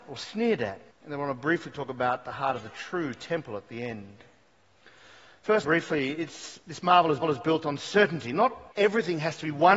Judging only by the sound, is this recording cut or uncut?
cut